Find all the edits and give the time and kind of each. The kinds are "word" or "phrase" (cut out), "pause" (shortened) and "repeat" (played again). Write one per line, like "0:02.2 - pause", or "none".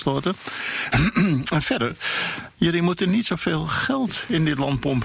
none